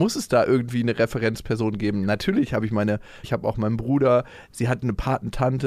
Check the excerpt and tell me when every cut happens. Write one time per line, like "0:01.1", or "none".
0:03.2